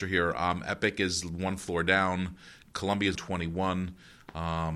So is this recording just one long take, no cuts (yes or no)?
no